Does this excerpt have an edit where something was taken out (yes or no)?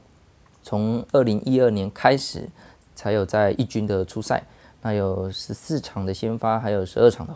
no